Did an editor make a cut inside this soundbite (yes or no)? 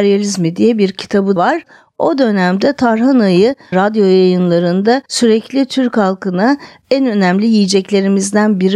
yes